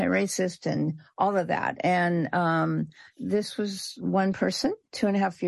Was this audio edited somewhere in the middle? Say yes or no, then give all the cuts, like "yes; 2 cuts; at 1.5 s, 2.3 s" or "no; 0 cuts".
no; 0 cuts